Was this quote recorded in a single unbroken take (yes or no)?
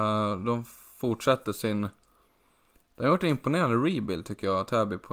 yes